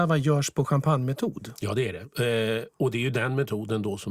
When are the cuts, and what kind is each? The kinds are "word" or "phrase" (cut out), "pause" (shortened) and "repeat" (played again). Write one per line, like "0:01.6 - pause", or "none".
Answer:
none